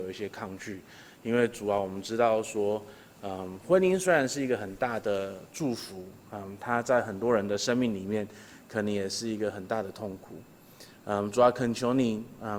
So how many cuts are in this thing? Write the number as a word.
one